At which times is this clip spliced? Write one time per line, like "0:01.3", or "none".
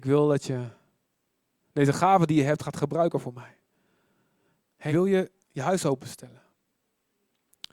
0:04.9
0:05.4

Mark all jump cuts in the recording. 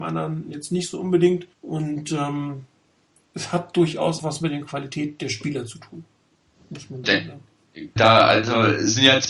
0:01.5
0:04.2
0:07.0
0:08.0

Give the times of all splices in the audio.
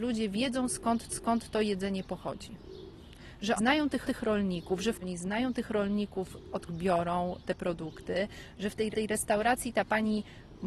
0:01.1
0:03.6
0:04.0
0:05.0
0:06.7
0:08.9

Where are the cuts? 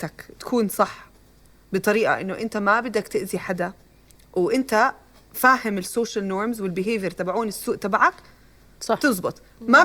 none

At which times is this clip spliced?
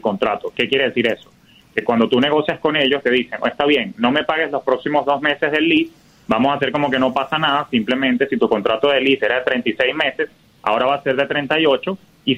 none

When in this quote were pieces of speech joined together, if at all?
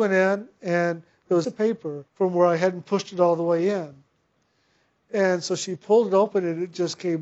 0:01.4
0:02.1

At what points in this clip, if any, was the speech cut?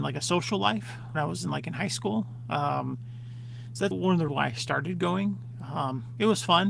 0:01.1
0:03.9
0:04.3

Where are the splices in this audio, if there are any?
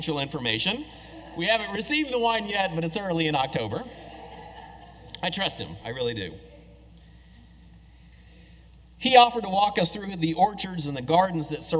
none

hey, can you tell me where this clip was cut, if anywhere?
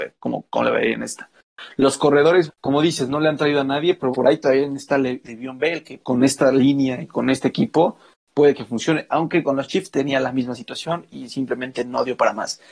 0:02.5
0:04.1
0:06.0

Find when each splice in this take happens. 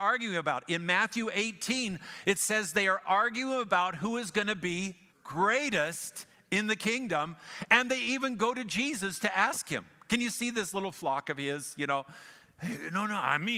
0:05.1

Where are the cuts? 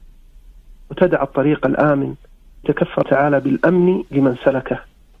0:02.6
0:03.0

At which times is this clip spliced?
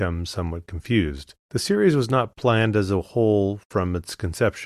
0:01.4

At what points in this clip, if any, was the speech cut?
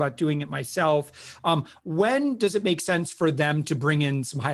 none

